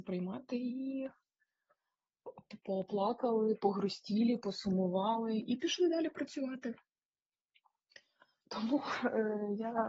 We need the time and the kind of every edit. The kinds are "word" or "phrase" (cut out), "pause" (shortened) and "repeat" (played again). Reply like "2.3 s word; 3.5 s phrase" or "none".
2.6 s word